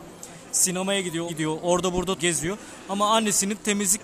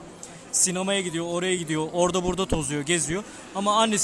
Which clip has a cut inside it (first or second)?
first